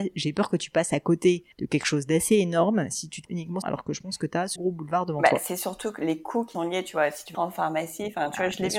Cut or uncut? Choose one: cut